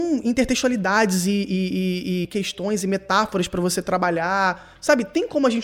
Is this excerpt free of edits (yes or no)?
yes